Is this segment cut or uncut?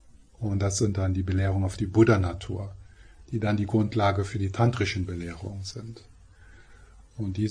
uncut